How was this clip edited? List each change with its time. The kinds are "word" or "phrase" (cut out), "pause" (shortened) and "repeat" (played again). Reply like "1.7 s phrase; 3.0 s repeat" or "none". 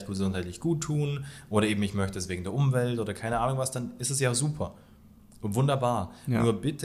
none

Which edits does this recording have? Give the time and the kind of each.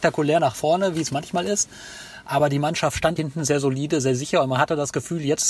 3.2 s word

